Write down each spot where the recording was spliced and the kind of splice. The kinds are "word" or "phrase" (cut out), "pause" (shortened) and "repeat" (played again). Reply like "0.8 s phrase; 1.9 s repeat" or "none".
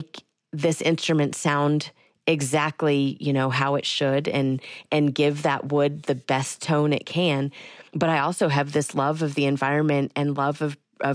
7.9 s pause